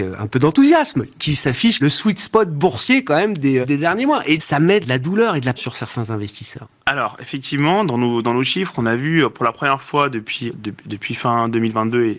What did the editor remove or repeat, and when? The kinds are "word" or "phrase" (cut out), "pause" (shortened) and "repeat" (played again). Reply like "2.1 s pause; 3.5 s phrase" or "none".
1.1 s word; 1.8 s word; 3.6 s word; 4.4 s word; 4.8 s word; 5.6 s word; 10.5 s word